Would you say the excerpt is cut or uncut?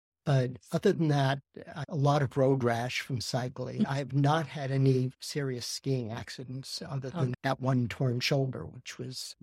cut